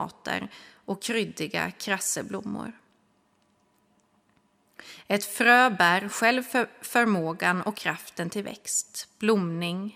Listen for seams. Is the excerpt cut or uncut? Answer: uncut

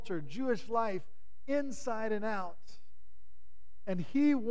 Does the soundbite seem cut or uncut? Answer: uncut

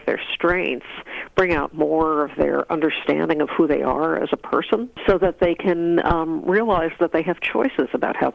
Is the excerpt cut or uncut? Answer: uncut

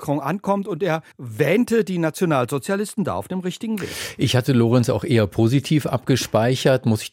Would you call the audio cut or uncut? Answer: cut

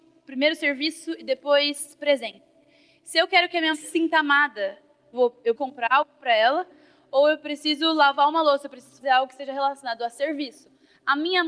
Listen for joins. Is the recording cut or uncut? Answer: cut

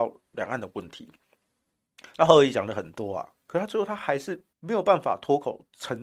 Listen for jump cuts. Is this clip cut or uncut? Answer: cut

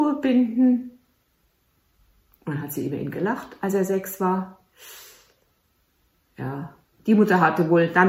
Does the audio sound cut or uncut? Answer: uncut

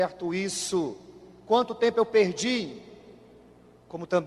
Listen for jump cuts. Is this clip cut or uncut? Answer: uncut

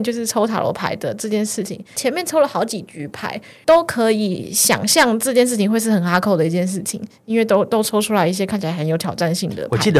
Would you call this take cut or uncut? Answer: uncut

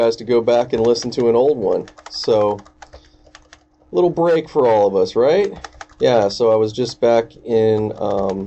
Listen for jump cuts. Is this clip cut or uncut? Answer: cut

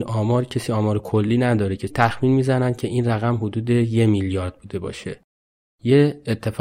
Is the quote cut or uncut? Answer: cut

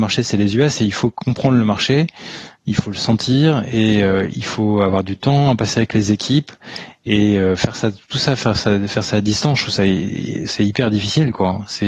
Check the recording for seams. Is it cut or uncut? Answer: uncut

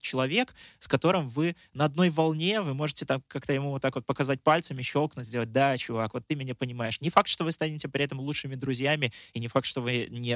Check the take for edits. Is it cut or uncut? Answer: uncut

